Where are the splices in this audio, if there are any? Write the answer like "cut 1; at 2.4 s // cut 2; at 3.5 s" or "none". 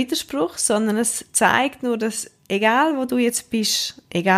none